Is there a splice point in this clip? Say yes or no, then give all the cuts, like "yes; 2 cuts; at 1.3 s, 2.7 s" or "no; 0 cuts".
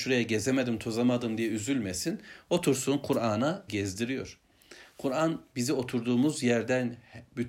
yes; 1 cut; at 3.7 s